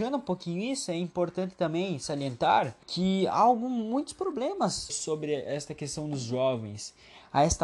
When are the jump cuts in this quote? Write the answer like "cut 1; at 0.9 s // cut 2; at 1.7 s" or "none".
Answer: cut 1; at 2.8 s // cut 2; at 4.9 s